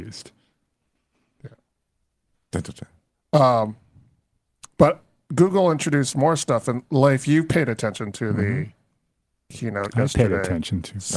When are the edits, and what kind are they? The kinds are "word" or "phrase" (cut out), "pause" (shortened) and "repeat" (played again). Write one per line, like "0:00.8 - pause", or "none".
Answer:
0:03.1 - word